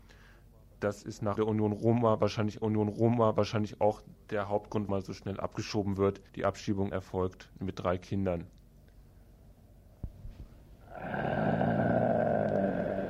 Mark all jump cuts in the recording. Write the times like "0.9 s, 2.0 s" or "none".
1.4 s, 2.6 s, 4.9 s, 6.3 s, 6.9 s, 7.5 s